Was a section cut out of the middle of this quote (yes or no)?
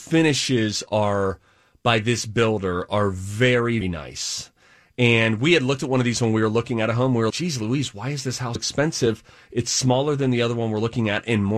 yes